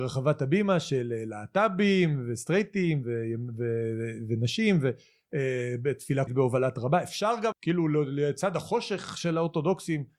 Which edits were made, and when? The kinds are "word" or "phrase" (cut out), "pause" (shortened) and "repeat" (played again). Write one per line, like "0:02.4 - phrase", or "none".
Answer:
0:03.0 - word
0:06.3 - word
0:07.5 - word